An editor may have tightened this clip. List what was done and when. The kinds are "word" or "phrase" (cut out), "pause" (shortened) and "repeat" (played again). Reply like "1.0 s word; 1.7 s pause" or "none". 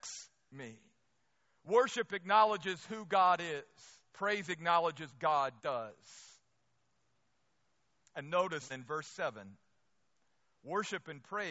4.1 s pause; 5.1 s word; 5.6 s pause; 8.7 s word

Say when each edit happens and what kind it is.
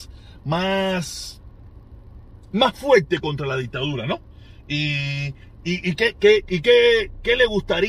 none

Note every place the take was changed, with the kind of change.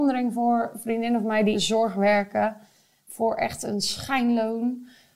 1.5 s word

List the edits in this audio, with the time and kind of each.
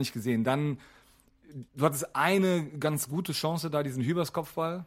1.7 s pause

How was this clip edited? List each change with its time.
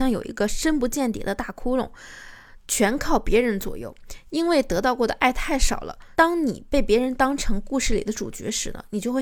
6.1 s phrase

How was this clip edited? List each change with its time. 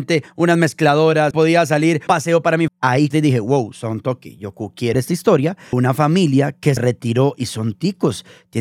1.3 s word; 2.1 s word; 2.7 s word; 3.1 s word; 4.9 s word; 5.7 s word; 6.8 s word

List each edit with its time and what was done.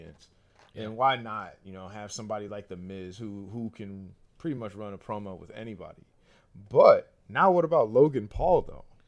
none

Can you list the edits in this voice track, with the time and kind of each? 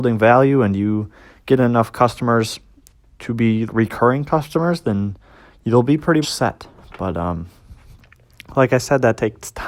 3.7 s word; 6.2 s word

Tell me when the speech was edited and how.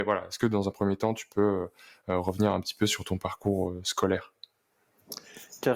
none

